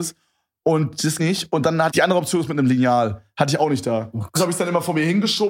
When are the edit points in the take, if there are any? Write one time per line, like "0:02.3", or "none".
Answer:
0:01.2
0:01.9
0:04.4